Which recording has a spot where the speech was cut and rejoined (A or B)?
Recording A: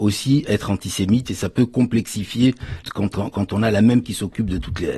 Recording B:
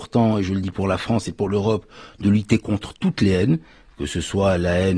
A